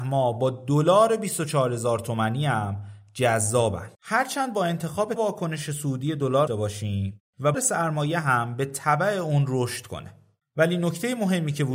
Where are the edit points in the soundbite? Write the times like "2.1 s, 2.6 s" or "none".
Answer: 3.9 s, 5.2 s, 6.5 s, 7.5 s